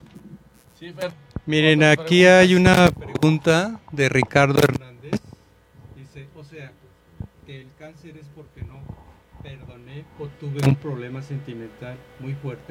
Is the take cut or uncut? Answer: uncut